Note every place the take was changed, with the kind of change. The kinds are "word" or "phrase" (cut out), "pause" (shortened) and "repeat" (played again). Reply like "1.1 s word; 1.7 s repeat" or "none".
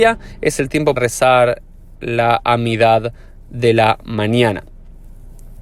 1.0 s word